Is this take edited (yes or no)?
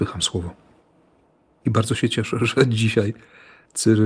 no